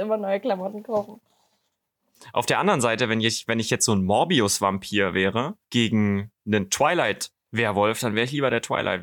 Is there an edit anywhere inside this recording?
yes; 1 cut; at 5.6 s

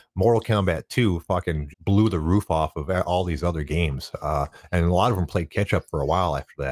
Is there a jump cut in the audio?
yes; 1 cut; at 1.7 s

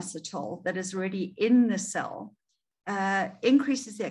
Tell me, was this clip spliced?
no; 0 cuts

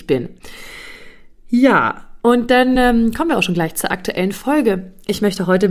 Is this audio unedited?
yes; 0 cuts

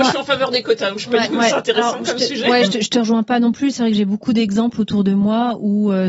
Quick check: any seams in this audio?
yes; 2 cuts; at 1.3 s, 2.7 s

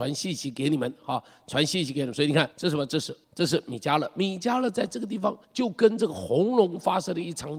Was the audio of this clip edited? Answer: yes; 3 cuts; at 2.5 s, 3.2 s, 5.4 s

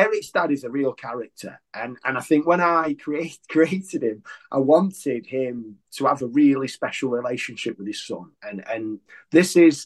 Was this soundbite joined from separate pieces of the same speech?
no; 0 cuts

